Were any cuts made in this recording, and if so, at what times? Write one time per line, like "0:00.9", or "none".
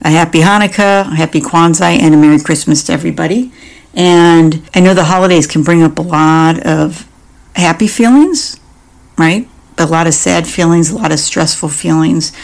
0:04.7